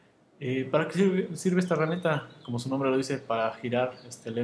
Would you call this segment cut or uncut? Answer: uncut